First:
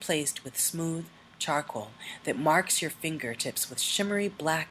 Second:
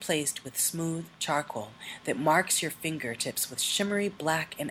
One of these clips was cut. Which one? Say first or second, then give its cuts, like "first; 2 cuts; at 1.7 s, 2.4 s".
second; 1 cut; at 1.1 s